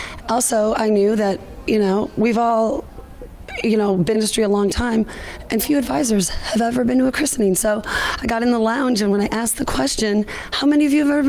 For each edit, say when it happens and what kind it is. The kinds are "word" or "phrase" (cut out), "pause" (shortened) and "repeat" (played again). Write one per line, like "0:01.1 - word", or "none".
0:04.1 - phrase
0:05.6 - word